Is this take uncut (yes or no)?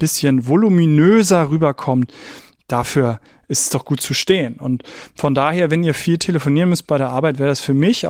yes